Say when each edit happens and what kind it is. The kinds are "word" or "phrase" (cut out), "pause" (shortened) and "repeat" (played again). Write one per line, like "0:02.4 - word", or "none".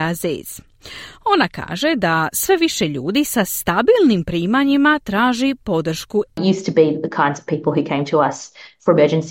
0:06.3 - word